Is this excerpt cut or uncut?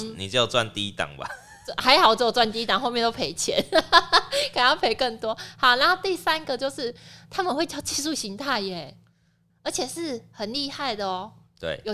cut